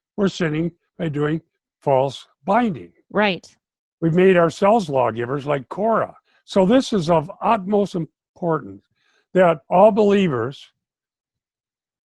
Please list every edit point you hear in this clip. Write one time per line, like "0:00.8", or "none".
0:01.6
0:03.0
0:06.2
0:09.6